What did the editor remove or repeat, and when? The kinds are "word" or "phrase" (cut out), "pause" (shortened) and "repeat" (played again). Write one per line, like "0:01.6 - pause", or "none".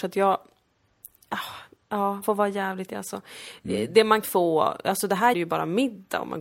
0:02.2 - word
0:02.9 - word
0:04.2 - word
0:05.3 - word